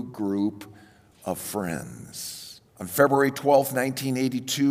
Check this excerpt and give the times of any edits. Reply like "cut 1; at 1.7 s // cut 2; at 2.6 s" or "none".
cut 1; at 2.7 s